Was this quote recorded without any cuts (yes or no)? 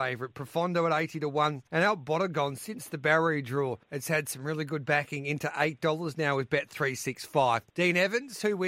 no